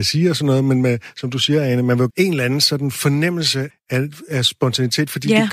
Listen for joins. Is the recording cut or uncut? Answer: cut